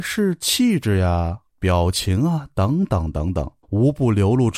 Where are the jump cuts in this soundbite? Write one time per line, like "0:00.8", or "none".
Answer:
0:01.5
0:03.6